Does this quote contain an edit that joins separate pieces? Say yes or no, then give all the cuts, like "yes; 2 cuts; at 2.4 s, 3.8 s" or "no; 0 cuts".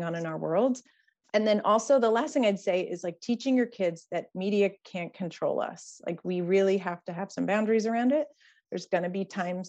no; 0 cuts